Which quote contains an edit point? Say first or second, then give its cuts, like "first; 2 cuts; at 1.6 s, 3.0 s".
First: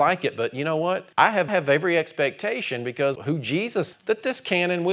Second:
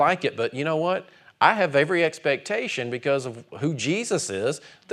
first; 4 cuts; at 1.1 s, 1.5 s, 3.2 s, 3.9 s